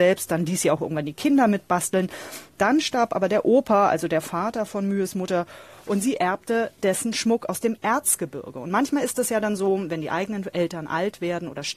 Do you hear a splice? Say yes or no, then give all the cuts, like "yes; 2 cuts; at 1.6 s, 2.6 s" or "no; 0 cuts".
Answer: no; 0 cuts